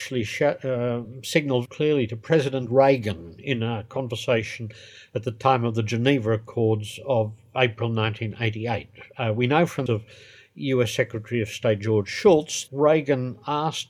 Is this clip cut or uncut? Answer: cut